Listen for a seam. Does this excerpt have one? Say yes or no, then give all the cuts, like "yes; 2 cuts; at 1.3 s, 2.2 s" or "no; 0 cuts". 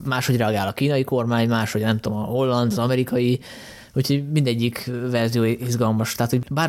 no; 0 cuts